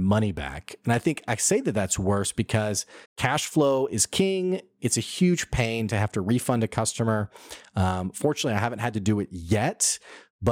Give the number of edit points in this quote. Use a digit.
1